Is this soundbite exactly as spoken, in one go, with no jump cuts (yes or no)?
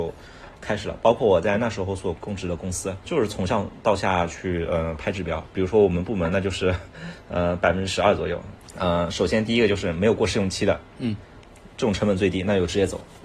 no